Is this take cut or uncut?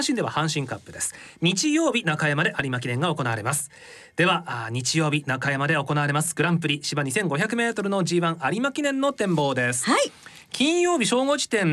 uncut